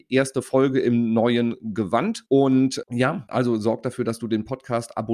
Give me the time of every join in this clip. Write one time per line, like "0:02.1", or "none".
none